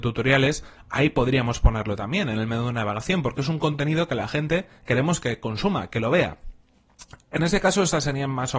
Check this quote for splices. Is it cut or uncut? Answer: uncut